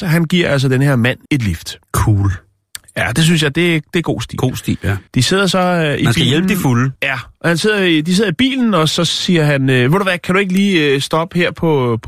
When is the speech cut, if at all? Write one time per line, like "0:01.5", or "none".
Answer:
0:01.3
0:01.8
0:05.1
0:07.0